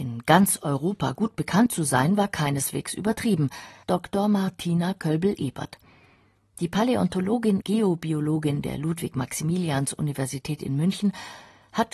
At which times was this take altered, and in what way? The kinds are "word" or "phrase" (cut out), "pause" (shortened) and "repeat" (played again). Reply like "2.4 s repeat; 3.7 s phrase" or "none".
3.8 s word; 7.6 s word

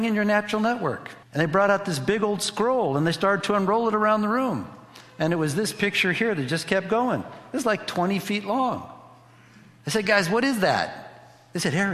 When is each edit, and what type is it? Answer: 1.2 s pause

